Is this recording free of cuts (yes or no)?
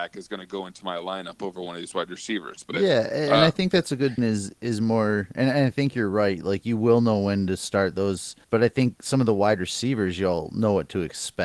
no